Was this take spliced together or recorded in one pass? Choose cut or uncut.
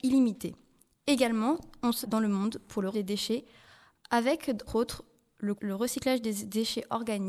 cut